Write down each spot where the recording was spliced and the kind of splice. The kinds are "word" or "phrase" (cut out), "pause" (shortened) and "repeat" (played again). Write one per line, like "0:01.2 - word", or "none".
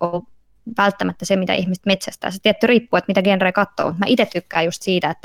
none